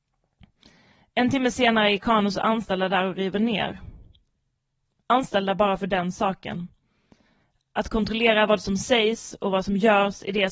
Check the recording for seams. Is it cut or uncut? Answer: uncut